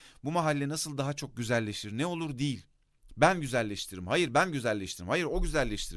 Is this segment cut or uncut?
uncut